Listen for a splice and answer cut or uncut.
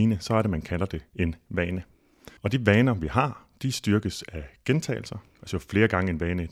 cut